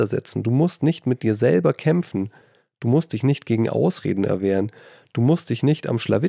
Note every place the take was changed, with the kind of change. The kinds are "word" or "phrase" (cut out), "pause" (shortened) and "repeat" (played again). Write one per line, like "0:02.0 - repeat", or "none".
none